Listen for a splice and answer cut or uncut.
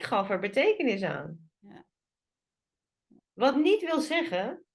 uncut